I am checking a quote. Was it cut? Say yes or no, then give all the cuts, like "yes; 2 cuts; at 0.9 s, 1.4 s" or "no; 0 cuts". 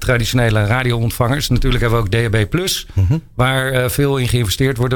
no; 0 cuts